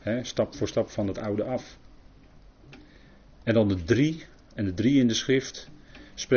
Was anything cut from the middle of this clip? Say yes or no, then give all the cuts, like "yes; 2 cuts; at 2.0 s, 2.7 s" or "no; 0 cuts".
no; 0 cuts